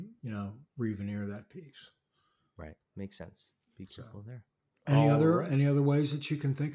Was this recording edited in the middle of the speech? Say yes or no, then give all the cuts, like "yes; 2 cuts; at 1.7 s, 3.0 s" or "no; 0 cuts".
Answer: yes; 2 cuts; at 2.9 s, 4.7 s